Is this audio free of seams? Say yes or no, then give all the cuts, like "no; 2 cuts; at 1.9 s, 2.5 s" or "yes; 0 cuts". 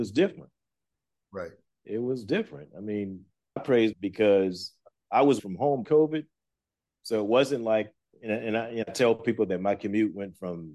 no; 6 cuts; at 3.6 s, 3.9 s, 5.4 s, 5.8 s, 8.1 s, 8.8 s